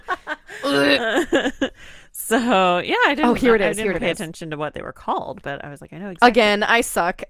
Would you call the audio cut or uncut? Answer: cut